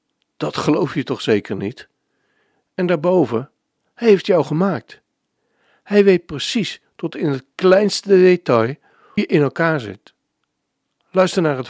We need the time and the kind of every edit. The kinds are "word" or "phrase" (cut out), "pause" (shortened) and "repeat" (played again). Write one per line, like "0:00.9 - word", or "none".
0:09.2 - word